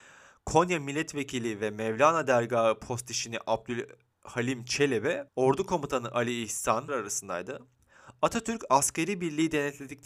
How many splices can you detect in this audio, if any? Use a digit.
2